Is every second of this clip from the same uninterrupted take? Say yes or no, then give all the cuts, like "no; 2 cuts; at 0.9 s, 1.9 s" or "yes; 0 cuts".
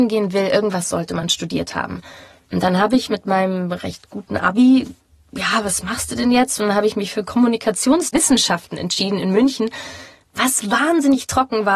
yes; 0 cuts